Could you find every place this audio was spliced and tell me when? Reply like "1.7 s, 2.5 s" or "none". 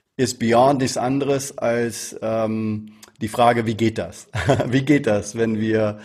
none